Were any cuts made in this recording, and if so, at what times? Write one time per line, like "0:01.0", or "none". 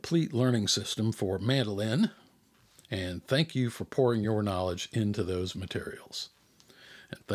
none